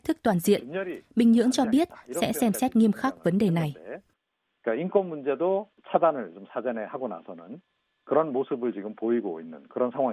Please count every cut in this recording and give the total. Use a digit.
0